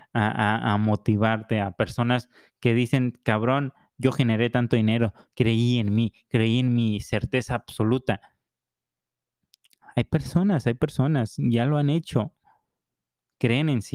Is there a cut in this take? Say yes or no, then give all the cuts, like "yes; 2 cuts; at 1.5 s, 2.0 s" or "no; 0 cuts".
no; 0 cuts